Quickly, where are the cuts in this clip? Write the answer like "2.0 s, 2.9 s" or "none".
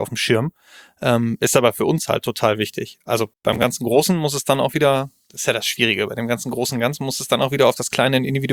3.3 s